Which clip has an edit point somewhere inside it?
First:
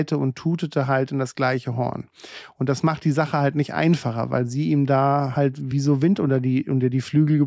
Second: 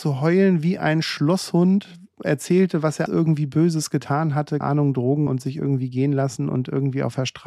second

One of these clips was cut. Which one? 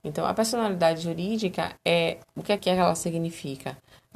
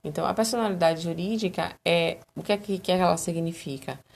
first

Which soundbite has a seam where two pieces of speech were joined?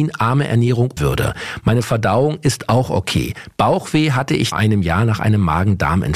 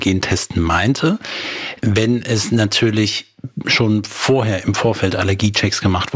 first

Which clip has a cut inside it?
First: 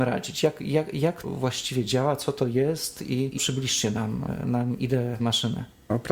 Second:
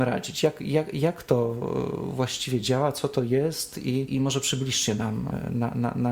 first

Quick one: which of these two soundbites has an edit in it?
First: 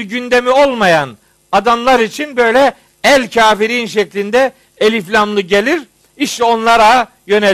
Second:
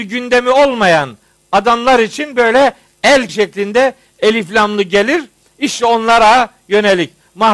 second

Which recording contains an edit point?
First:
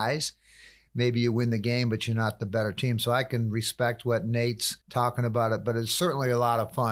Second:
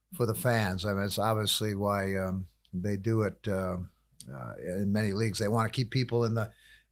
first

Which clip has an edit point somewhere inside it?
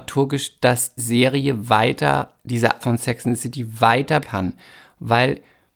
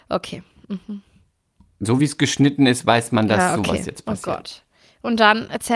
first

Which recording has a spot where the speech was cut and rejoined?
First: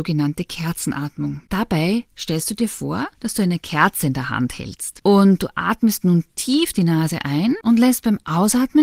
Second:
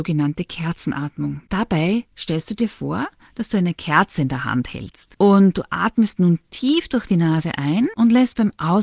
first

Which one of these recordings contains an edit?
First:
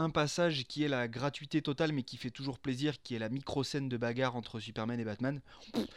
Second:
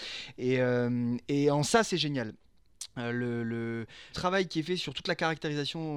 second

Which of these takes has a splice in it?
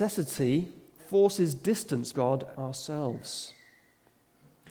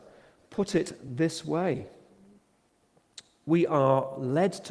first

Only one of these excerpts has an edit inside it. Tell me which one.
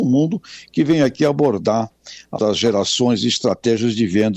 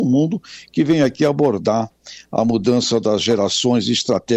first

